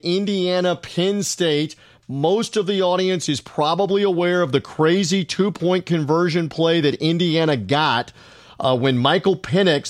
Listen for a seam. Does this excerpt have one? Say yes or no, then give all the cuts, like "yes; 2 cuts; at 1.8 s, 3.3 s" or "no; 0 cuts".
no; 0 cuts